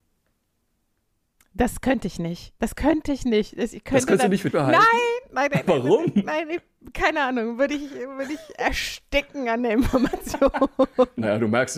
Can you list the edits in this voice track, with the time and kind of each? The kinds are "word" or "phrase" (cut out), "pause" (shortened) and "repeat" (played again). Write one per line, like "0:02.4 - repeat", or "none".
0:04.5 - word